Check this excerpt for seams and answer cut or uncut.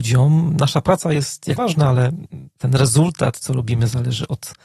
cut